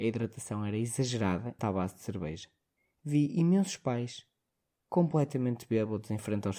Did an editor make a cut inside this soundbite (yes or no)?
yes